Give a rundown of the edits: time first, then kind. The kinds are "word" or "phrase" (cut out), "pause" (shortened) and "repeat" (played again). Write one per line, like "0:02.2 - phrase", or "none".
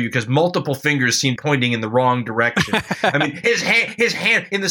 0:01.4 - phrase
0:03.4 - word